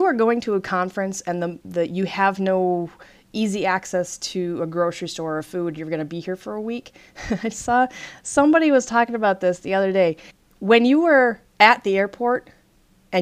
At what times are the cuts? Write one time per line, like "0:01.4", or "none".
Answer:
0:10.3